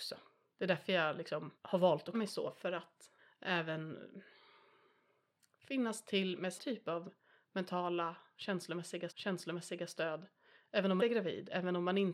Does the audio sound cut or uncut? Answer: cut